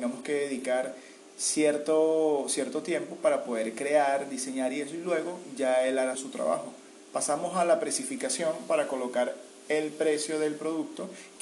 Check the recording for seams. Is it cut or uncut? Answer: cut